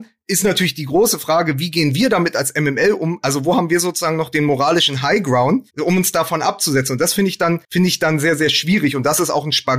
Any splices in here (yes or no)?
yes